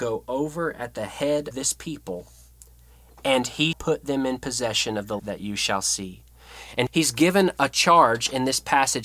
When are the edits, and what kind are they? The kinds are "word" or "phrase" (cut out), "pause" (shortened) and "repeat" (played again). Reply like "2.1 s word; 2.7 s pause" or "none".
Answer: 1.5 s word; 3.7 s word; 5.2 s word; 6.9 s word